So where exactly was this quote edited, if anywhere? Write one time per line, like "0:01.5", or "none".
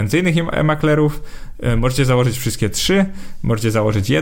none